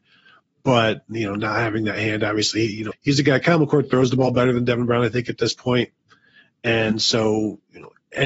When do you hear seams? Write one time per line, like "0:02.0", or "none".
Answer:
0:02.9